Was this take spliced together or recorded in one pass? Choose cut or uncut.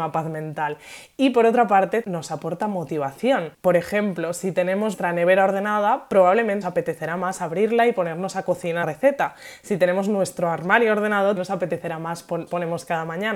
cut